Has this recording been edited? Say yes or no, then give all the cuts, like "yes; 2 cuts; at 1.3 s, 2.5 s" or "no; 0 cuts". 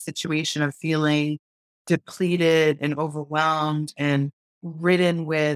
no; 0 cuts